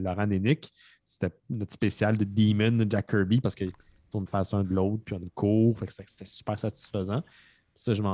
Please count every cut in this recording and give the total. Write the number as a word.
three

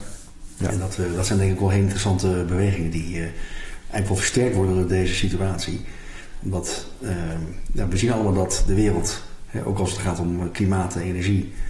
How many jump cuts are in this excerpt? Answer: zero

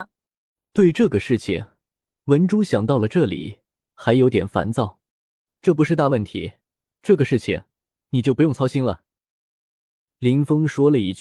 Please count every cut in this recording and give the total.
one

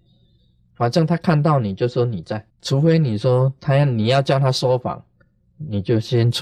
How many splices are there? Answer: one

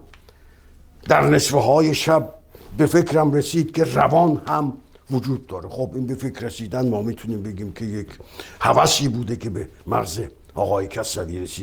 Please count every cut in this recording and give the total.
zero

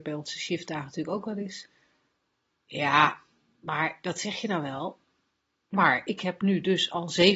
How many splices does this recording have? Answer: zero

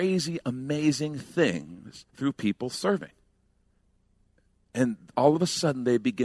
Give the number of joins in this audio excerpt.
one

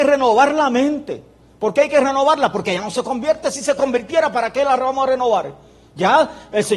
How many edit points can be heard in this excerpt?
zero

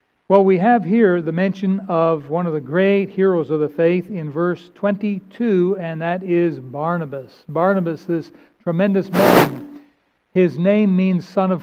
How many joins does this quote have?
zero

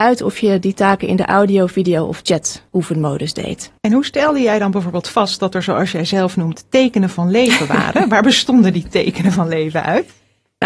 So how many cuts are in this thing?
two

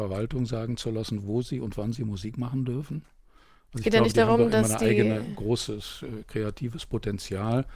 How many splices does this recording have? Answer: zero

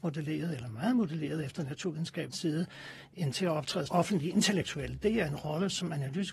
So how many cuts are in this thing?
three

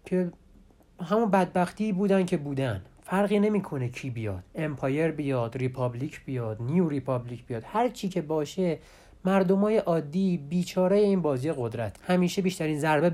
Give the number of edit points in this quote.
one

